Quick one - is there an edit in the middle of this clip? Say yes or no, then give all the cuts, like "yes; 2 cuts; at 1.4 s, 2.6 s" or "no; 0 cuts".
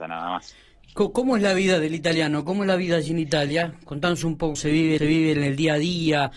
yes; 2 cuts; at 4.6 s, 5.0 s